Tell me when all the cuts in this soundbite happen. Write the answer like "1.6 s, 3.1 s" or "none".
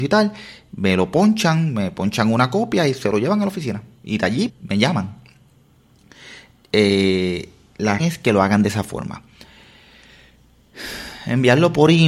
4.5 s, 8.0 s